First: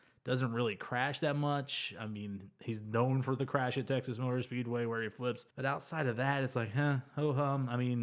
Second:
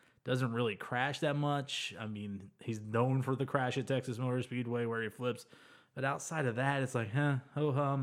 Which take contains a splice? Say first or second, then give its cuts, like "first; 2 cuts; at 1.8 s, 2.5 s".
first; 1 cut; at 5.5 s